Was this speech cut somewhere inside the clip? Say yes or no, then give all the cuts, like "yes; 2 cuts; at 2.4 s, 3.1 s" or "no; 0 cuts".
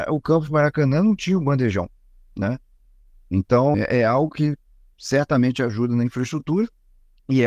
yes; 1 cut; at 3.7 s